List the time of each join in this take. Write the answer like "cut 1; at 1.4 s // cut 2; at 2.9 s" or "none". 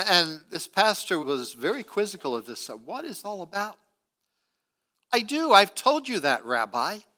cut 1; at 1.2 s // cut 2; at 3.2 s